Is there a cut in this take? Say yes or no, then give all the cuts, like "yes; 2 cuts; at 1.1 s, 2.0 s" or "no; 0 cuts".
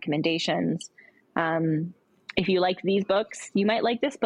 no; 0 cuts